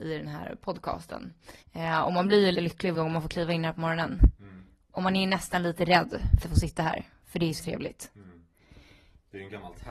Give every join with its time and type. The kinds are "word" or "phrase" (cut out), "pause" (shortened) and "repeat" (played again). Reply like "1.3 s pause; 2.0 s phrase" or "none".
1.6 s pause; 2.5 s word; 2.9 s word; 6.4 s phrase; 7.6 s word

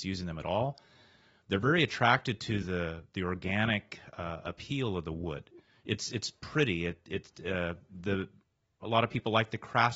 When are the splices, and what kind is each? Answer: none

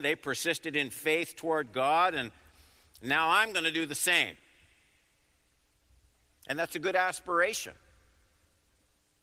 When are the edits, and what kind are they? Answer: none

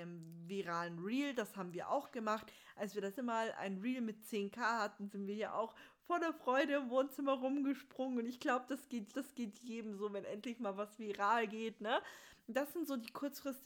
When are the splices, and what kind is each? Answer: 3.1 s word; 9.1 s repeat

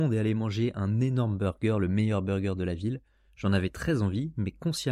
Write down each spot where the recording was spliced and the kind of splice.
none

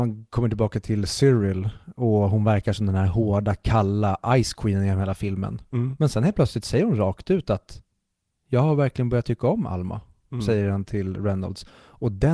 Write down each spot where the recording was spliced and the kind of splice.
none

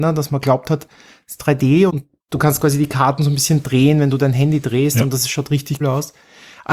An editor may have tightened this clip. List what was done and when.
1.9 s word; 5.8 s word

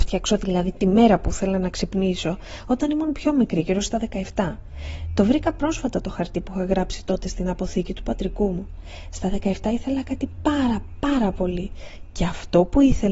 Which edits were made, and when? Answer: none

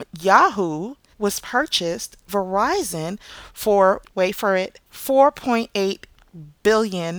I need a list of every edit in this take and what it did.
1.1 s pause; 2.3 s word; 4.0 s word; 4.9 s pause

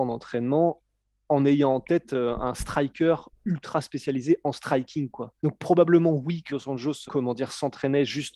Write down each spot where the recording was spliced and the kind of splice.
5.4 s pause; 6.5 s word; 7.1 s word

